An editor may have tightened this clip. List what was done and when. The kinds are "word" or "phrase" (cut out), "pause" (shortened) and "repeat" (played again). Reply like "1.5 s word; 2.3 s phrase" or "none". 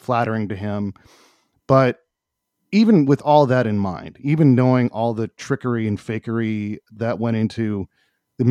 none